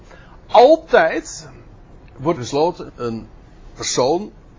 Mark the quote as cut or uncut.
cut